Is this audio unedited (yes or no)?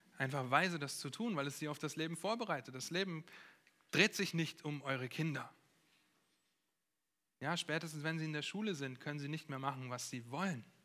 yes